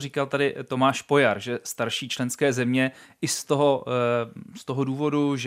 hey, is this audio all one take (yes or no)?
yes